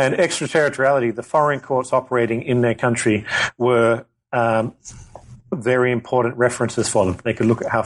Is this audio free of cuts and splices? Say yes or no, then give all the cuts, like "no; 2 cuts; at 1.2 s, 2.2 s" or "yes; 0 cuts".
yes; 0 cuts